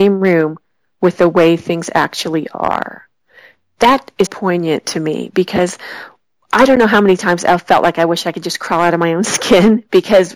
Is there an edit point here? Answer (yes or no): yes